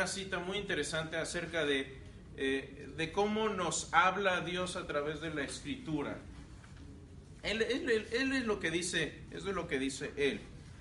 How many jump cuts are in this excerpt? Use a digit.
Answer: 0